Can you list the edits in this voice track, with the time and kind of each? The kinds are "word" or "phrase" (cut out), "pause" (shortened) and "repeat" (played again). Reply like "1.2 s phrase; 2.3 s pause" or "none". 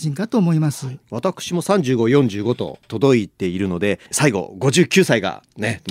4.0 s pause